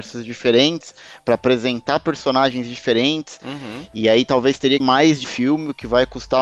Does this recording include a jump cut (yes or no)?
yes